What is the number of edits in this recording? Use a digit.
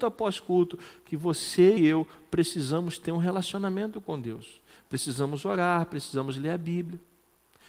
1